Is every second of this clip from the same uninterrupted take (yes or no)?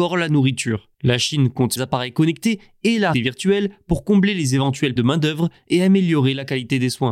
no